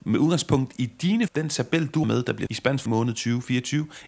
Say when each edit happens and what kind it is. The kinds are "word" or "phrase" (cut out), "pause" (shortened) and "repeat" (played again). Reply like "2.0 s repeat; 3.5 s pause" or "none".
1.3 s word; 2.0 s word; 2.5 s word; 2.9 s phrase